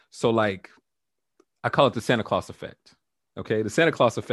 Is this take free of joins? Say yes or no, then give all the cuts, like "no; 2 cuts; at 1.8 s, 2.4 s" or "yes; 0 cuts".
yes; 0 cuts